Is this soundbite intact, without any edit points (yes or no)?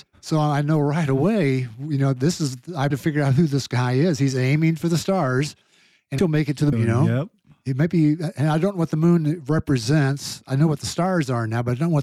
no